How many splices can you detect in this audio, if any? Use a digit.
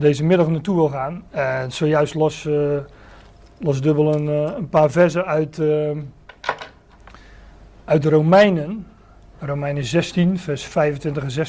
1